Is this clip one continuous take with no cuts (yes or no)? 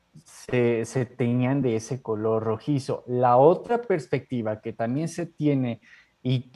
yes